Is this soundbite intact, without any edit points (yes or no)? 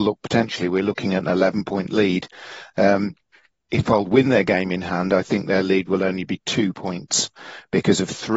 yes